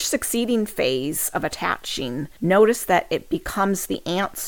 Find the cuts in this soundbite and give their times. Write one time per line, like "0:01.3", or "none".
0:02.4